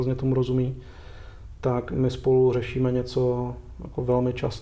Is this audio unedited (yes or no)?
yes